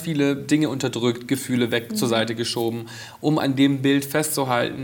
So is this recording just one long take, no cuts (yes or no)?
yes